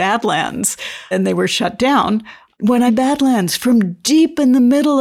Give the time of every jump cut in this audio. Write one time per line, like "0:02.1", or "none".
0:01.1
0:02.9